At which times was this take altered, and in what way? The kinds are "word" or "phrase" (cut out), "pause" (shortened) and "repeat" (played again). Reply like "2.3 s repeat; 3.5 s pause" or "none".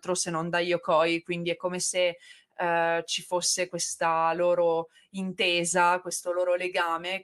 none